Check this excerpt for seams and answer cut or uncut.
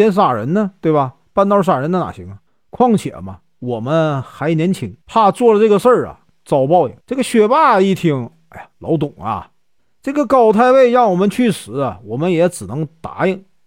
cut